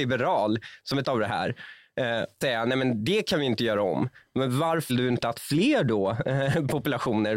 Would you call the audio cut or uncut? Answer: cut